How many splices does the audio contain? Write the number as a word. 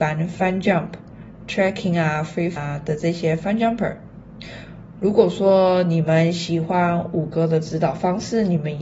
one